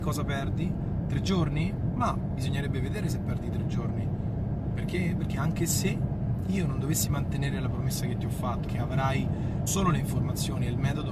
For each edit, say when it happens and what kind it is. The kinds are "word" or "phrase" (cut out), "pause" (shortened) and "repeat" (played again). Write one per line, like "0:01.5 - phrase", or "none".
0:08.7 - word
0:09.7 - word